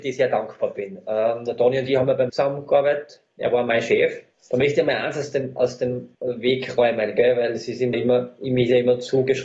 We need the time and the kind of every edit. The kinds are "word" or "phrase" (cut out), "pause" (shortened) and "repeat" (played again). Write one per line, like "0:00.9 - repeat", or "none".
0:02.3 - word
0:06.1 - pause
0:07.9 - word